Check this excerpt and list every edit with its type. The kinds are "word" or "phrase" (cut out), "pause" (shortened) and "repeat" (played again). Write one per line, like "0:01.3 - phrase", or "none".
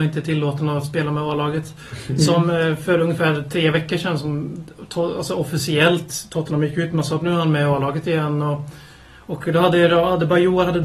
none